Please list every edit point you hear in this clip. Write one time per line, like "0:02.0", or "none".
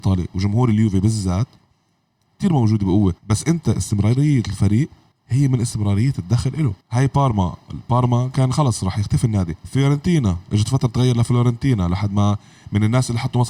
0:03.2
0:05.1
0:06.8
0:09.6